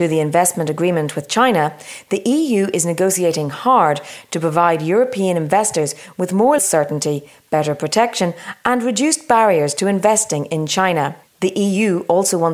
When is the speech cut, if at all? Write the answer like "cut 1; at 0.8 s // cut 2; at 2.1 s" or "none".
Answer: cut 1; at 6.6 s